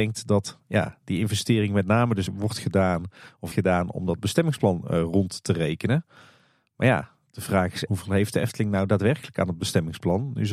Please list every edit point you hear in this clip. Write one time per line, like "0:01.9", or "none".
0:02.3
0:03.5
0:07.9